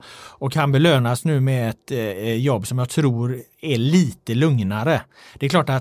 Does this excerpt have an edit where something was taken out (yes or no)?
no